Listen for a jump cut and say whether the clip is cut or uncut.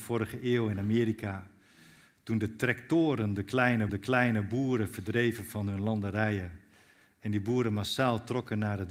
cut